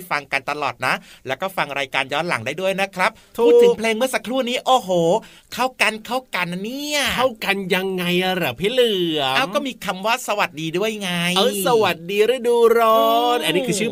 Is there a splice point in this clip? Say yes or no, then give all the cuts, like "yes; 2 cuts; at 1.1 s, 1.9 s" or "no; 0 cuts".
no; 0 cuts